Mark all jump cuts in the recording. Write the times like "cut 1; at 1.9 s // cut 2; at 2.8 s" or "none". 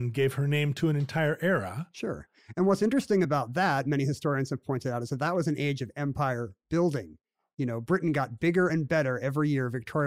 none